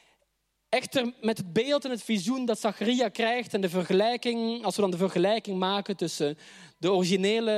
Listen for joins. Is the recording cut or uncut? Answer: uncut